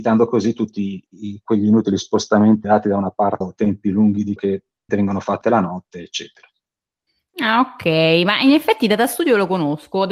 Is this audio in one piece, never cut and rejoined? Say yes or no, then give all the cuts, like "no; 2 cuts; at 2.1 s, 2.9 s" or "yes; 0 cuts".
no; 6 cuts; at 1.1 s, 2.6 s, 3.4 s, 4.4 s, 4.9 s, 5.4 s